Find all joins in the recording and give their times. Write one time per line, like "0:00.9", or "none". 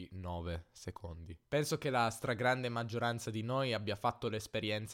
0:01.4